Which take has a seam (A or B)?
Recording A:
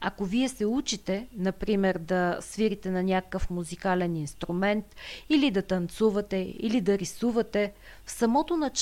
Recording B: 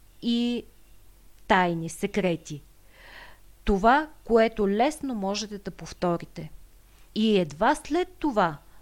B